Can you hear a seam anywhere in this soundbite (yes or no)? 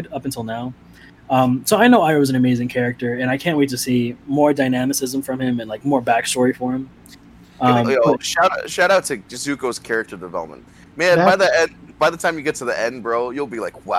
no